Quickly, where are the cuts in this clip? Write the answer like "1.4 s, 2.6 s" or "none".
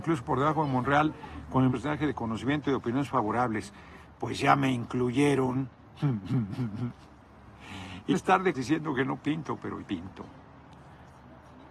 1.7 s, 8.1 s, 8.5 s, 9.8 s